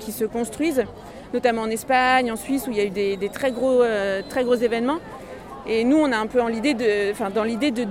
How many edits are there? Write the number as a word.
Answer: zero